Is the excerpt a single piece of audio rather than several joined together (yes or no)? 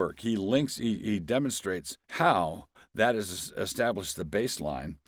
no